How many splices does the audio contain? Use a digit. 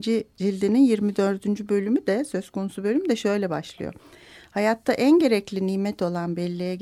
0